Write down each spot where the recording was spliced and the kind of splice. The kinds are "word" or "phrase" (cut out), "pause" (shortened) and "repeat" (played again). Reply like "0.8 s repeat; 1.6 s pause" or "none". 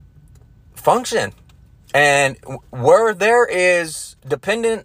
none